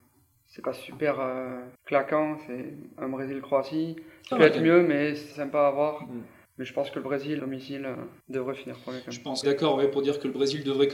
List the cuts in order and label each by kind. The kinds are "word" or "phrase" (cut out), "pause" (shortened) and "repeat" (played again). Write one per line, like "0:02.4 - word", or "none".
0:01.7 - pause
0:04.3 - word
0:05.3 - word
0:06.4 - pause
0:07.4 - word
0:08.2 - pause
0:09.4 - phrase